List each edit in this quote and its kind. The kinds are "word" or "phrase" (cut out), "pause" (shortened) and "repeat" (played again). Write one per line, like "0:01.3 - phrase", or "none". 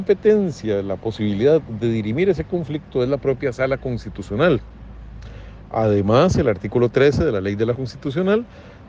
0:07.8 - word